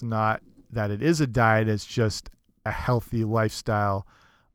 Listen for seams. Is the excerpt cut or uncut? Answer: uncut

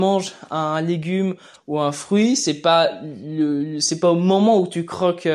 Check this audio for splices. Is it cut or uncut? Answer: uncut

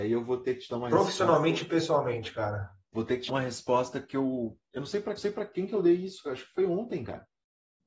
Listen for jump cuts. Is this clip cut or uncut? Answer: cut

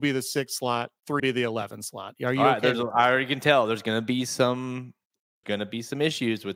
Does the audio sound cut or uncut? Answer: cut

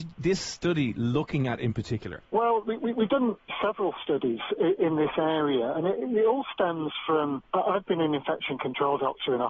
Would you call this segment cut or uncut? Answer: uncut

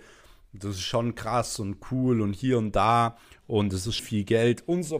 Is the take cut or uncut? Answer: cut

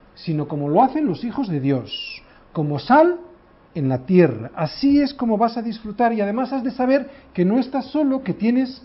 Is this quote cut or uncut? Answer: uncut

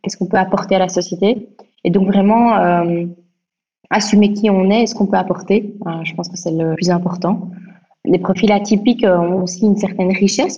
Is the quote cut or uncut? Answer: cut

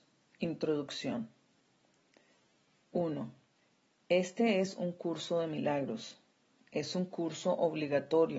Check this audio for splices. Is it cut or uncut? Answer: uncut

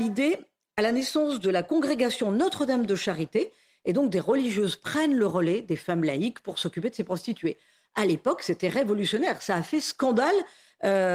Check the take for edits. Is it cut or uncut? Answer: uncut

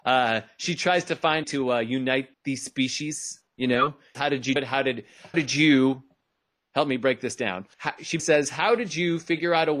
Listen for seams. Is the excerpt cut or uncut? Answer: cut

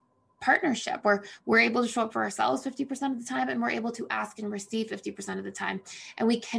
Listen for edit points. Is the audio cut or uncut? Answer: uncut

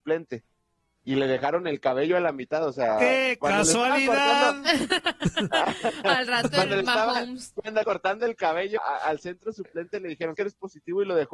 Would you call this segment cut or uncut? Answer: cut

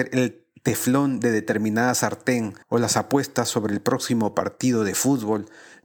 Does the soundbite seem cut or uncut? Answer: cut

